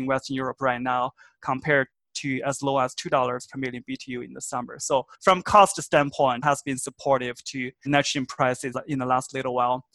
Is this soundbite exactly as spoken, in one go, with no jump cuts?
no; 4 cuts; at 5.1 s, 6.4 s, 7.9 s, 8.7 s

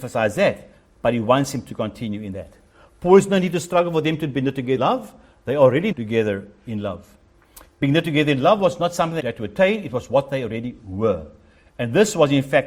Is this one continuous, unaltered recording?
no; 3 cuts; at 4.8 s, 5.9 s, 9.2 s

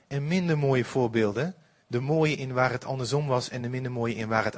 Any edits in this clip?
no; 0 cuts

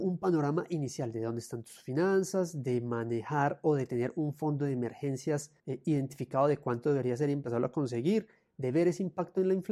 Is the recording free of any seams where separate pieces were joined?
no; 1 cut; at 5.6 s

